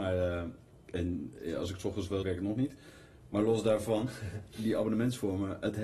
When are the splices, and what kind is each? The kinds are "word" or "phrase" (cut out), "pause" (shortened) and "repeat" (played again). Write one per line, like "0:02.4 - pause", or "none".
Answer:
0:02.2 - phrase
0:04.5 - word